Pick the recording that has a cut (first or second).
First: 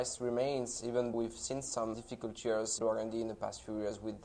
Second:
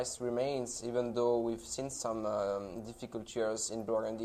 first